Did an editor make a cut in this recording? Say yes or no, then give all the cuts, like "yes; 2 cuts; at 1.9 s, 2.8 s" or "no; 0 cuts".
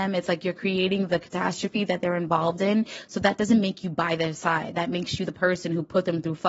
no; 0 cuts